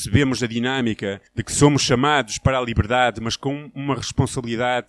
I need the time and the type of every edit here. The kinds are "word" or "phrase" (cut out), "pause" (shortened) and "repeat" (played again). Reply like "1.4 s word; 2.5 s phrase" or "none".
1.3 s pause

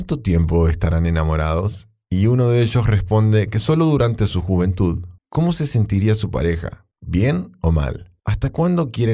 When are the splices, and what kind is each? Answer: 5.2 s pause; 6.9 s pause; 8.2 s pause

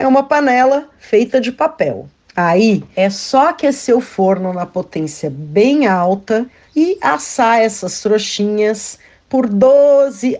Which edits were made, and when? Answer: none

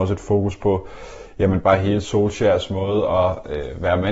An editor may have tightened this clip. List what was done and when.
none

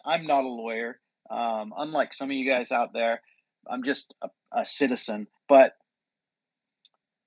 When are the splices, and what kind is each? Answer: 5.4 s pause

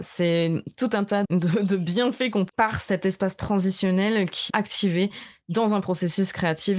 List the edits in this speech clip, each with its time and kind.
1.2 s word; 2.5 s word; 4.5 s word

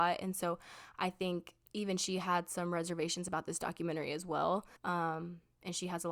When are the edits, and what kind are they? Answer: 1.6 s pause; 4.8 s pause

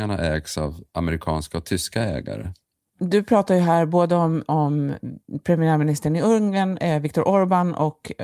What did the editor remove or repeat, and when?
none

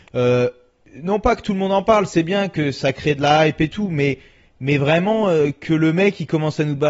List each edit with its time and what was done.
none

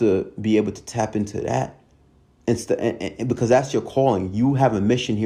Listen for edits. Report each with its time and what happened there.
2.1 s pause

